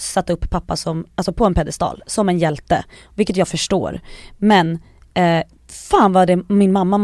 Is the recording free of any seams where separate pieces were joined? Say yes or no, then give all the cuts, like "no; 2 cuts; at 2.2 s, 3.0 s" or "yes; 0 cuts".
yes; 0 cuts